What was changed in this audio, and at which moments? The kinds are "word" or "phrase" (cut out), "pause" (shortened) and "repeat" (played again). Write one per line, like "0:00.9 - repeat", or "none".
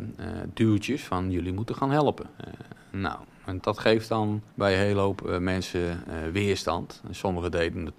0:02.3 - pause
0:03.6 - word
0:04.5 - pause

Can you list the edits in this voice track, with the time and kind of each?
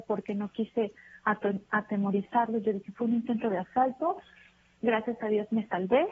none

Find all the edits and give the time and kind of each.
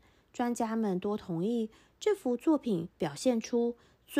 0:02.9 - pause

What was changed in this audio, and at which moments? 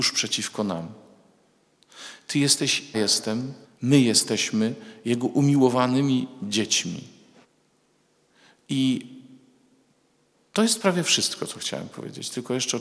0:02.9 - word
0:03.6 - pause
0:07.4 - pause

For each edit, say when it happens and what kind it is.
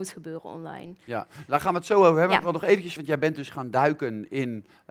0:03.0 - phrase

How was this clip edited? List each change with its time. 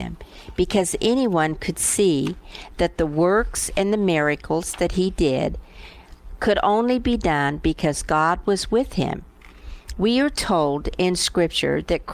none

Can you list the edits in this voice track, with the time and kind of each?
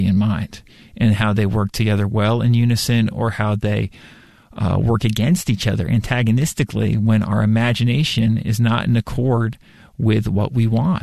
none

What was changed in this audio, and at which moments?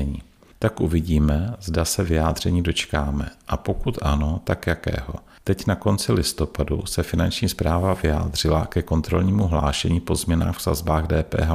none

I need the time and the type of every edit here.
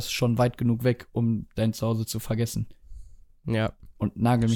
none

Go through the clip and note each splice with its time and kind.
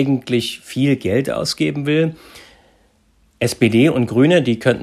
none

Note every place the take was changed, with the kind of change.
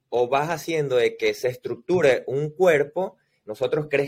none

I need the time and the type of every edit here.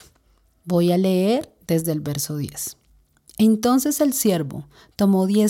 none

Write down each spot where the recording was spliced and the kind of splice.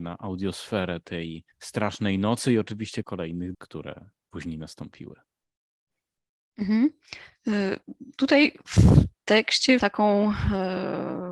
0:01.5 - pause
0:03.0 - word
0:03.5 - word
0:09.8 - word

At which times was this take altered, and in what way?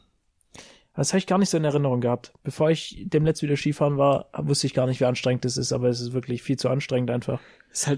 none

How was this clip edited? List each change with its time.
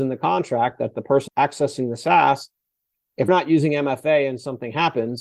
0:01.3 - word
0:03.3 - word

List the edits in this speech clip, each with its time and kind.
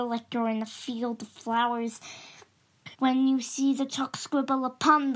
0:02.9 - pause

